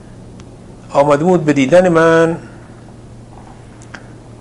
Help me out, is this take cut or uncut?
uncut